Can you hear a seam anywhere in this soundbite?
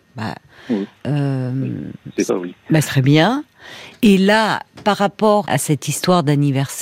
yes; 3 cuts; at 2.3 s, 2.8 s, 5.4 s

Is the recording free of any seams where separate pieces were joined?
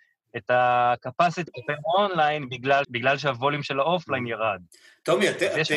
no; 3 cuts; at 1.5 s, 2.8 s, 3.6 s

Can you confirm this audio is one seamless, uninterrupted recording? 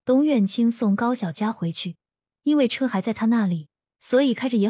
yes; 0 cuts

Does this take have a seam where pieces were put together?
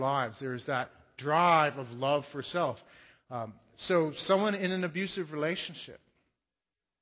no; 0 cuts

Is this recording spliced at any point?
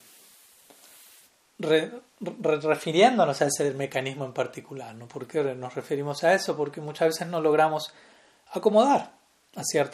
no; 0 cuts

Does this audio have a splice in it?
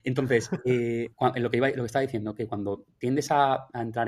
yes; 1 cut; at 1.1 s

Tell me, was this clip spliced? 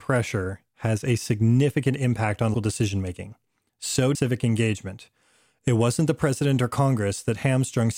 yes; 2 cuts; at 2.5 s, 4.1 s

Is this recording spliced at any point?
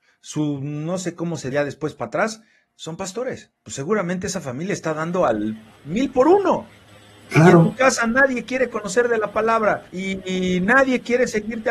yes; 4 cuts; at 1.5 s, 3.6 s, 6.9 s, 9.9 s

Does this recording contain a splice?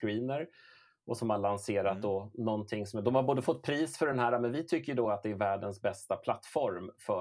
no; 0 cuts

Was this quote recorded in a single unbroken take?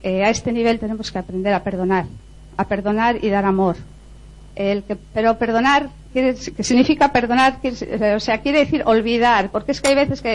no; 1 cut; at 4.5 s

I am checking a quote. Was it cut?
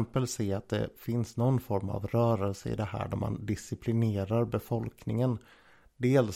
no; 0 cuts

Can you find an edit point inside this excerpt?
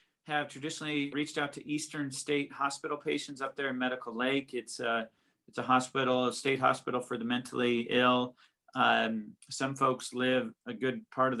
yes; 1 cut; at 1.1 s

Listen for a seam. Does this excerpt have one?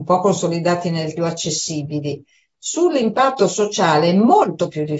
yes; 1 cut; at 1.2 s

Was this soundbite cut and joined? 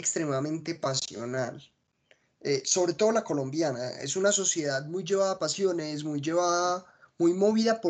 no; 0 cuts

